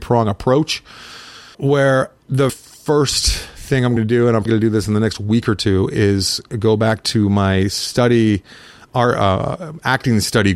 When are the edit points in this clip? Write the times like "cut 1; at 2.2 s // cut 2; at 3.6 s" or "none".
cut 1; at 1.5 s // cut 2; at 2.5 s // cut 3; at 4.0 s // cut 4; at 4.5 s

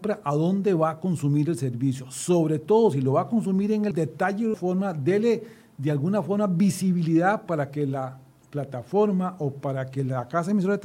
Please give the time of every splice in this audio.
cut 1; at 3.9 s // cut 2; at 4.5 s

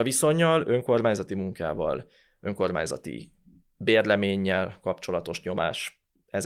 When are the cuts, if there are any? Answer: none

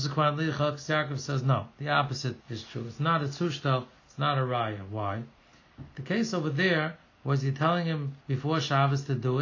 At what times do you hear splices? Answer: cut 1; at 1.7 s // cut 2; at 2.4 s // cut 3; at 8.2 s

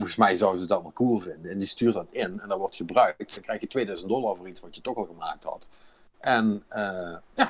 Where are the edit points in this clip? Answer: none

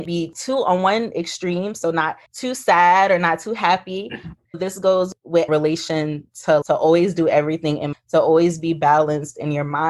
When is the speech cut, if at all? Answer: cut 1; at 2.3 s // cut 2; at 4.5 s // cut 3; at 5.5 s // cut 4; at 6.6 s // cut 5; at 7.9 s

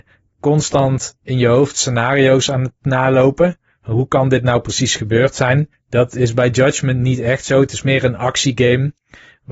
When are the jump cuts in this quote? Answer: cut 1; at 5.7 s

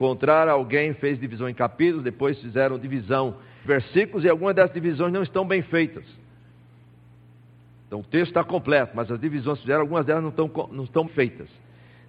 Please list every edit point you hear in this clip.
cut 1; at 3.6 s // cut 2; at 11.1 s

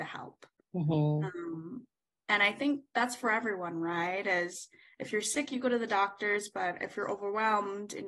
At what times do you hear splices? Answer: none

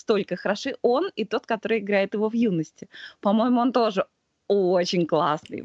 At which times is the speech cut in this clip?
none

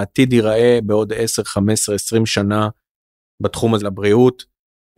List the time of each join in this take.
cut 1; at 3.8 s

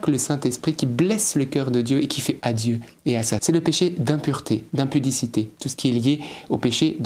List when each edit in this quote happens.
cut 1; at 2.4 s // cut 2; at 3.4 s

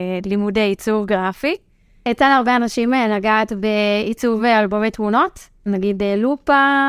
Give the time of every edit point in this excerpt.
none

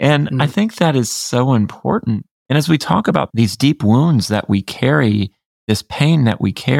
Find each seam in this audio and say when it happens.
cut 1; at 2.4 s

